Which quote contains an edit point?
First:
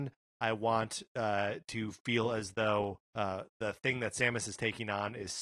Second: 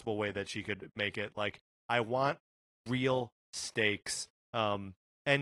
first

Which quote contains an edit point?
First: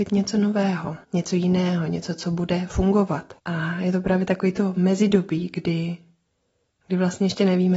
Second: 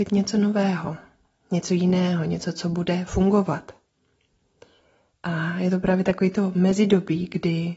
first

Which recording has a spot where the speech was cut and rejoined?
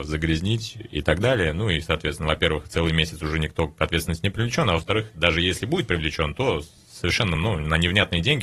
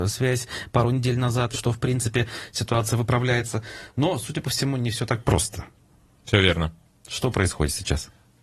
second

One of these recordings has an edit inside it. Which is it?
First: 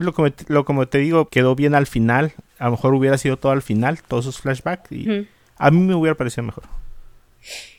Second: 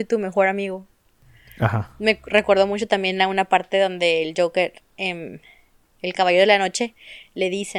first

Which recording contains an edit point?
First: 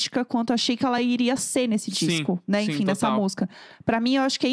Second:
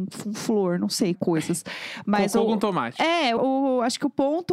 second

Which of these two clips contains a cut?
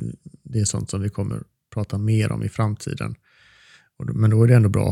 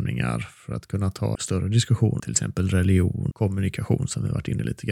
second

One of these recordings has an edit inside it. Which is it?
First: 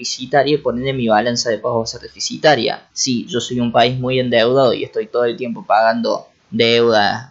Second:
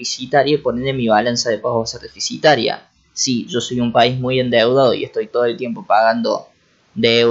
first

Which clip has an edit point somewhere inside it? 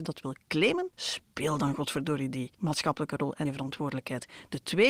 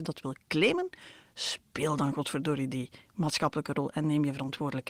first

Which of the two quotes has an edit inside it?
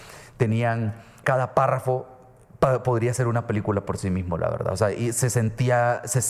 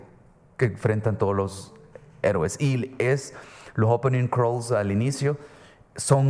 first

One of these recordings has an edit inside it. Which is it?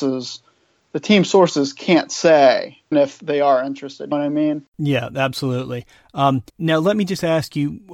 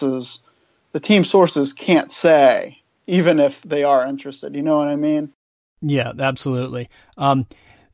first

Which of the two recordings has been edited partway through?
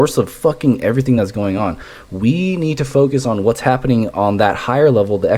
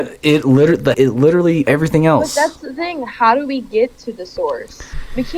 second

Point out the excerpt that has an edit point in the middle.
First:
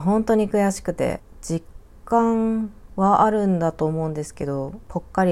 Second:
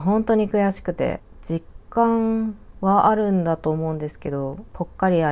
second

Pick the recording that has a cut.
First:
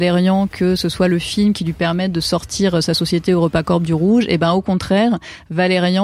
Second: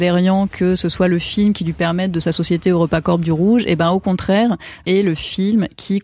second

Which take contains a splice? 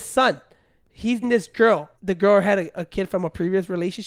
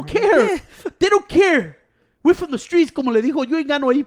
first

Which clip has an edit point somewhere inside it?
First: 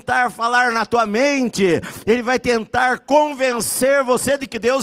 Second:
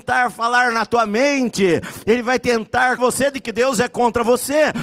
second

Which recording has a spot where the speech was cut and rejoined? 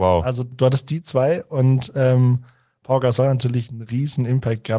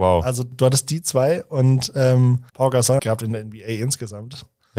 second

